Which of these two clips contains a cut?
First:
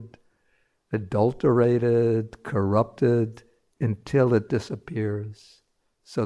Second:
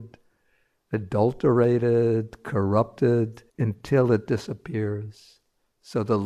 second; 1 cut; at 3.5 s

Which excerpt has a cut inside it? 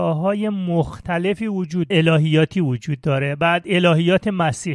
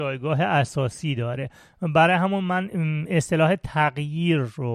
first; 1 cut; at 1.9 s

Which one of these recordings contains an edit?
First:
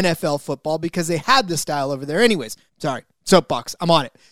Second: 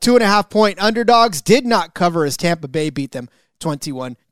first; 1 cut; at 2.7 s

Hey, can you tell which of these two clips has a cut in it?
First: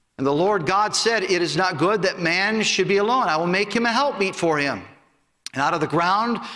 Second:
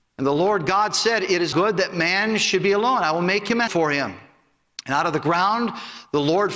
second; 2 cuts; at 1.5 s, 3.7 s

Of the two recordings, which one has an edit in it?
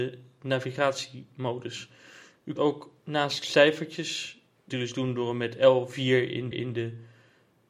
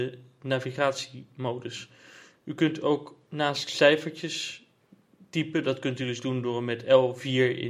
first; 3 cuts; at 2.6 s, 4.7 s, 6.5 s

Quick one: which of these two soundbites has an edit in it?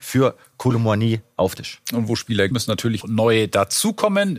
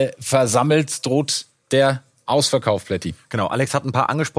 first; 3 cuts; at 1.6 s, 2.5 s, 3.0 s

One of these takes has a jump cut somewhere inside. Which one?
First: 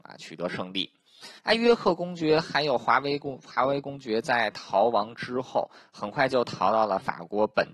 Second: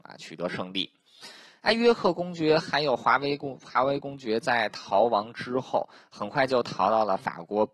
first; 1 cut; at 1.4 s

